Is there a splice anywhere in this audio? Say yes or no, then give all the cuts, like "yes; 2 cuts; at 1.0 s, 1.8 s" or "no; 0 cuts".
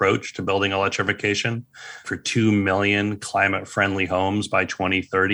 yes; 1 cut; at 2.0 s